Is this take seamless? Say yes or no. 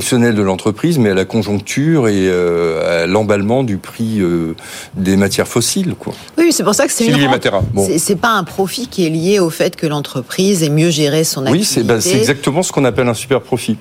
yes